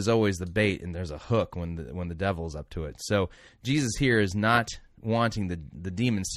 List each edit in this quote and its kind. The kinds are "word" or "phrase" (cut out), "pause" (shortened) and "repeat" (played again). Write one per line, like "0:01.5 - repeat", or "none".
none